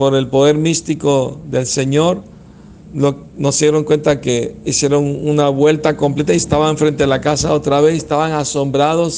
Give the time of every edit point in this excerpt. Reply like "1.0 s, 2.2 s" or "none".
none